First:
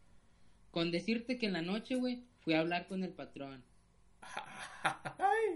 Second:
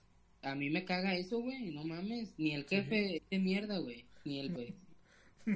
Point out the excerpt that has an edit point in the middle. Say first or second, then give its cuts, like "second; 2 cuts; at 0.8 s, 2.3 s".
second; 2 cuts; at 3.2 s, 4.5 s